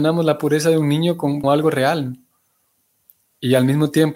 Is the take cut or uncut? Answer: cut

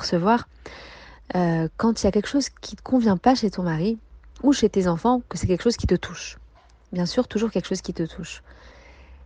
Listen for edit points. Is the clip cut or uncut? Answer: uncut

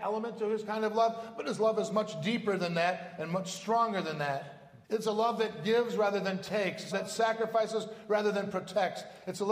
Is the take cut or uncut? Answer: cut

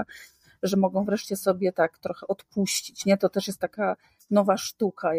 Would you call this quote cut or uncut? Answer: uncut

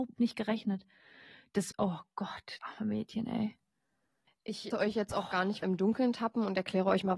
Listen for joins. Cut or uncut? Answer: cut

